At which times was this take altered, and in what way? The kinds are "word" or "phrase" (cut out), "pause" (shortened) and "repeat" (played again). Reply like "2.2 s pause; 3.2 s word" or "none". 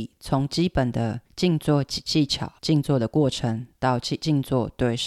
1.3 s pause; 2.6 s pause